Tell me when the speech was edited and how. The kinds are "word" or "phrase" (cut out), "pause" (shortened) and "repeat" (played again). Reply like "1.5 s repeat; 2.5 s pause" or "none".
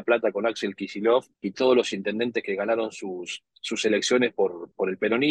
1.3 s pause